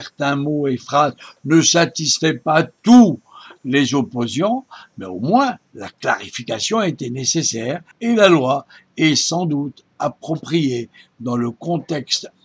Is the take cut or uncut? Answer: cut